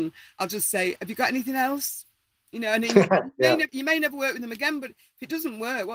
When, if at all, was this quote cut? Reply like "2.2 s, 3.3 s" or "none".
3.7 s